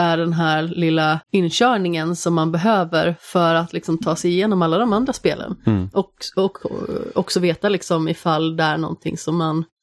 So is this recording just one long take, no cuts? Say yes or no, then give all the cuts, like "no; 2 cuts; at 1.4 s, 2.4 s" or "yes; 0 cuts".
no; 1 cut; at 1.2 s